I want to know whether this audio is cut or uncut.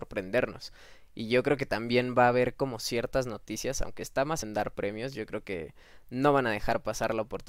cut